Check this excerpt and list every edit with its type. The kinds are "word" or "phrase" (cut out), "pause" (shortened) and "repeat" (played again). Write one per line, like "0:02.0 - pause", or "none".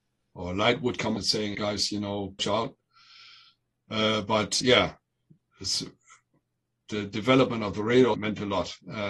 0:01.2 - word
0:01.5 - word
0:02.4 - word
0:04.6 - word
0:08.1 - word